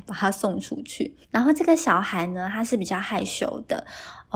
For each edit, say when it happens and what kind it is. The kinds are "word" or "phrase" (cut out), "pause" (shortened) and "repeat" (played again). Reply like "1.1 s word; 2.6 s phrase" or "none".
1.2 s pause